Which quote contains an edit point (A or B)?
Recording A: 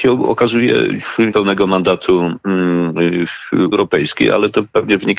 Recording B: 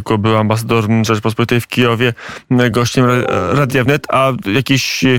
A